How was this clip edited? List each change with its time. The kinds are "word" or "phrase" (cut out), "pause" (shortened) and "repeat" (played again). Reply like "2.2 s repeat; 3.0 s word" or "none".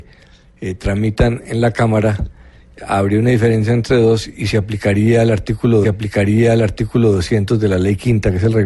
5.8 s repeat